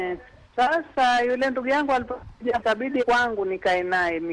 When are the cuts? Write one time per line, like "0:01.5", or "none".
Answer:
0:02.6
0:03.0